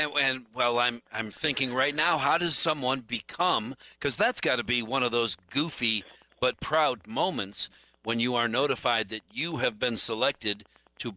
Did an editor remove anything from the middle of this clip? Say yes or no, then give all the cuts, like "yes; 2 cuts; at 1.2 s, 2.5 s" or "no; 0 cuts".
yes; 1 cut; at 6.5 s